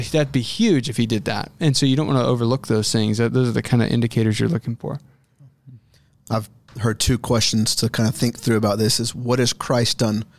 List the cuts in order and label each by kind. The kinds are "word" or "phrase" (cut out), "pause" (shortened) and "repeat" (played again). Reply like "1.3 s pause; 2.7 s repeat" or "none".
none